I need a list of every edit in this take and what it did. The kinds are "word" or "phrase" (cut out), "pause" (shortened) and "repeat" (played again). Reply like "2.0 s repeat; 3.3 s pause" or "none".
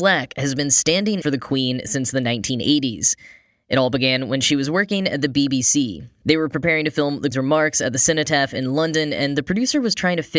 1.2 s word; 7.3 s word

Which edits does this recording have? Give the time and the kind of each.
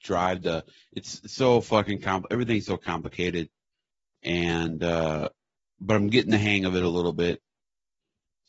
none

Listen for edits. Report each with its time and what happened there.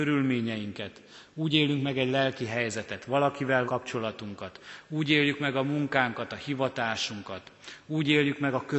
3.7 s word

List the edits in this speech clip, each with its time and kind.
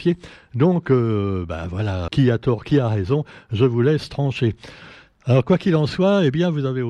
2.1 s word

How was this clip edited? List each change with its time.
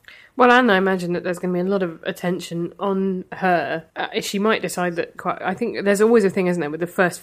3.9 s pause; 5.2 s phrase

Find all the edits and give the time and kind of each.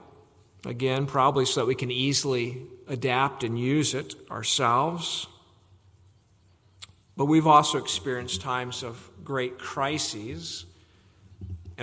none

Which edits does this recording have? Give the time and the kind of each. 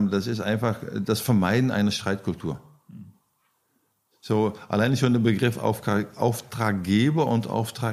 none

